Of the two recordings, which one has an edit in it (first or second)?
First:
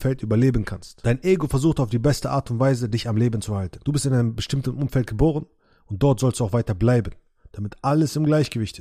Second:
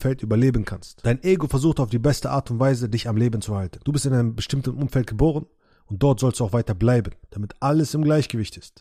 second